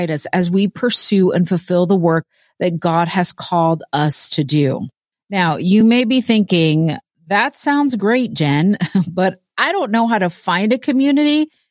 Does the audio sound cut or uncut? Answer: uncut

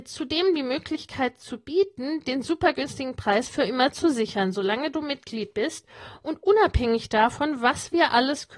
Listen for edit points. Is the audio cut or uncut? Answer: uncut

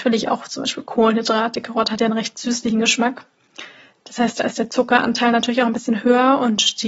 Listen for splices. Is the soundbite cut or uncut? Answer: uncut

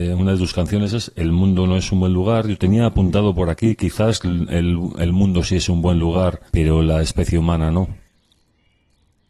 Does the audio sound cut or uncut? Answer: cut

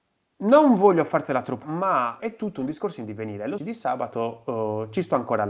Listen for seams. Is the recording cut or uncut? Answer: cut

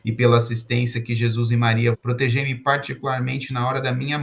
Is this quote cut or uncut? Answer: cut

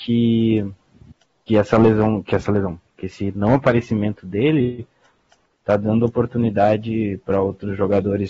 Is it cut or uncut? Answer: uncut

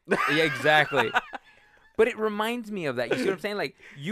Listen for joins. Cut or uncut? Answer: uncut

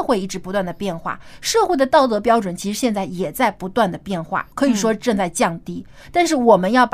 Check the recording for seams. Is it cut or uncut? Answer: cut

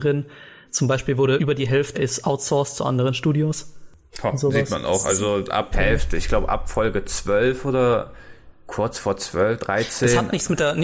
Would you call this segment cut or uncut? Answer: cut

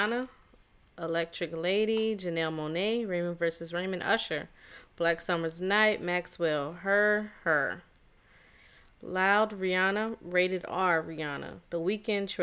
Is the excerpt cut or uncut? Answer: uncut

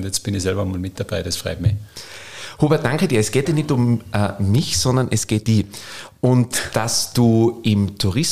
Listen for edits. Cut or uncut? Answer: cut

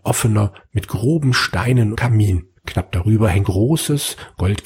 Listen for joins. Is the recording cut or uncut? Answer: cut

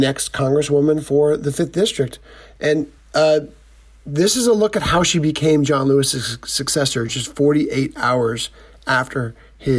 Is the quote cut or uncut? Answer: uncut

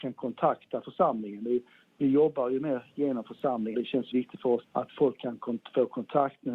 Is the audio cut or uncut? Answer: cut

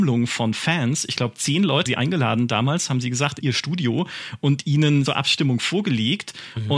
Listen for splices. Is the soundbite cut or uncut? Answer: cut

